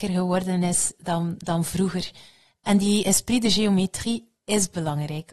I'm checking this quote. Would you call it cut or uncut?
uncut